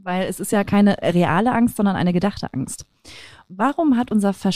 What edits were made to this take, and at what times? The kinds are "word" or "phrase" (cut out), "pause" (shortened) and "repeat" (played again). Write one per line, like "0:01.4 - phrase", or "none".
none